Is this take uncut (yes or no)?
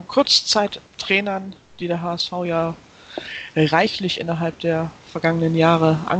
yes